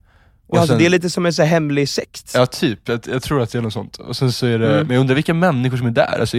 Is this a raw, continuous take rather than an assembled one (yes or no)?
yes